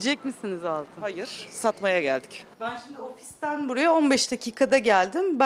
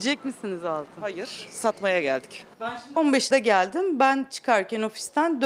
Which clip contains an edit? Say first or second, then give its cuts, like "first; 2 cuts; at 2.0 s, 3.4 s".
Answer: second; 2 cuts; at 3.0 s, 3.3 s